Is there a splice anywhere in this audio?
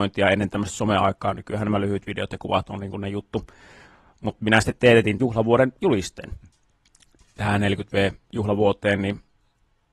yes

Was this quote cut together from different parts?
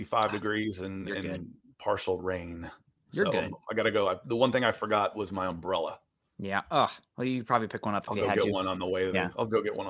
no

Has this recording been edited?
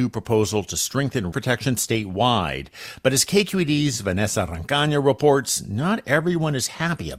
yes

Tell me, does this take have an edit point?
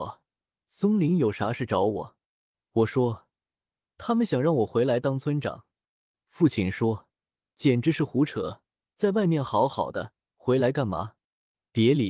no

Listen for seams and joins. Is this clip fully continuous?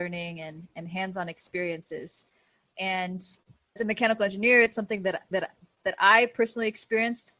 no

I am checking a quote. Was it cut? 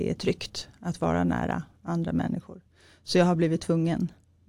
no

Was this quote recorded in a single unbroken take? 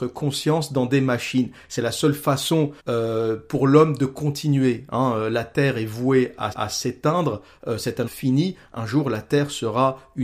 no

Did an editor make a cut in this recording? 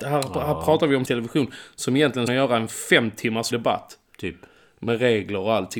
yes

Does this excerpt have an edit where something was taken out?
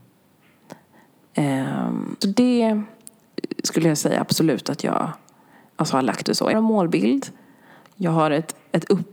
yes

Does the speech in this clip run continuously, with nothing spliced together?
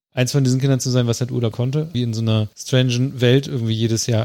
no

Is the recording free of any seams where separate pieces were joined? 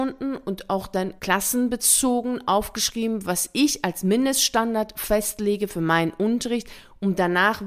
no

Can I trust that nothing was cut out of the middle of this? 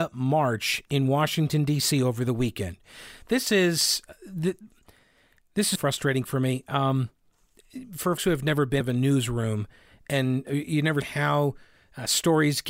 no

